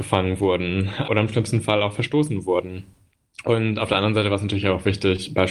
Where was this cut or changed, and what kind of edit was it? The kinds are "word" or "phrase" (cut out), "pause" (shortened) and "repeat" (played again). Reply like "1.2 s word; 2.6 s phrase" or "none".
none